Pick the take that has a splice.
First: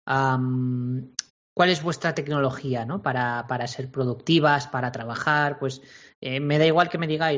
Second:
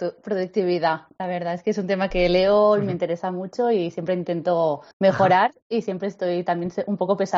second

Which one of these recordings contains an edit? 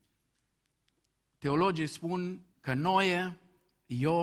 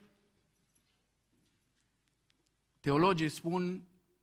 first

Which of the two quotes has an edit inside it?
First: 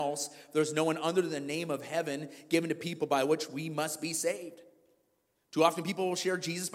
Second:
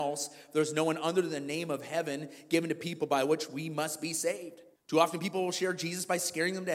second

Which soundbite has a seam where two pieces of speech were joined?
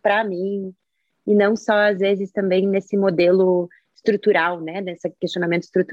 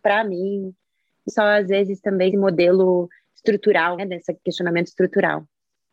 second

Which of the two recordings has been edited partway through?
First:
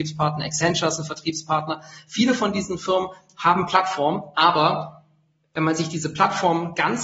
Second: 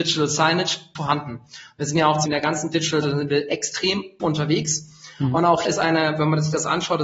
second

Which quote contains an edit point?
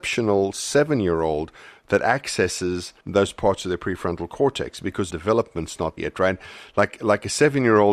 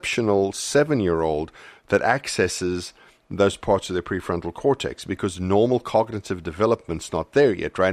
first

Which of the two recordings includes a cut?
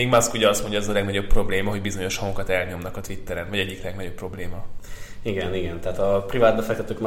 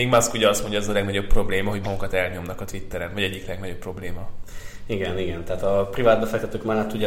second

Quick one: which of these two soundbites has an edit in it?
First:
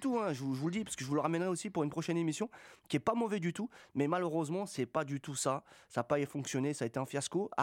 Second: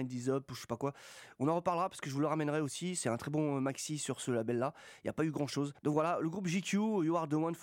second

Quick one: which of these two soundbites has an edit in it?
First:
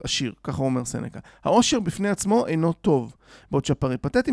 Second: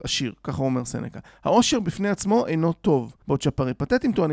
second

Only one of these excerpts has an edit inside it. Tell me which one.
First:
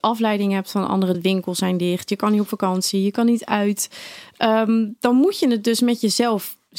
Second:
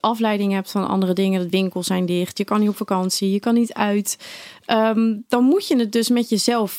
first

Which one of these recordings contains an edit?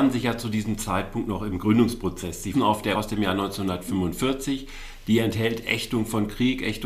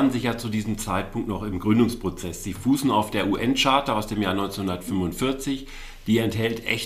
first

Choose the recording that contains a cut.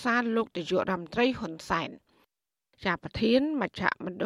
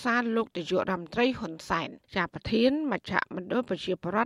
second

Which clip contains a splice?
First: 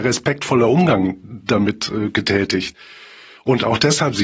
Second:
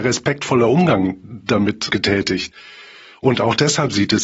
second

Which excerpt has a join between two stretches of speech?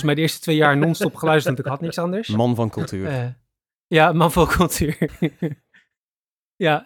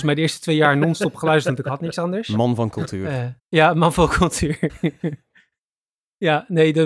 second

